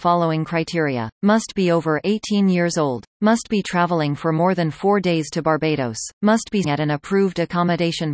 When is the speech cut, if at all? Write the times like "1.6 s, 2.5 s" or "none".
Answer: 1.1 s, 3.1 s, 6.1 s, 6.6 s